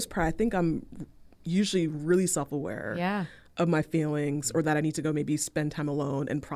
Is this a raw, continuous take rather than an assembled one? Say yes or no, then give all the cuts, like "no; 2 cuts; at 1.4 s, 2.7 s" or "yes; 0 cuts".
yes; 0 cuts